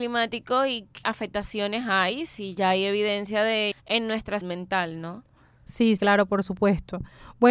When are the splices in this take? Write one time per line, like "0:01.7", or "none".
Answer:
0:01.0
0:03.7
0:04.4
0:06.0